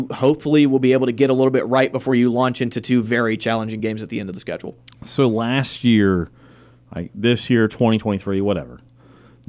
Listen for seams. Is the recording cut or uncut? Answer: uncut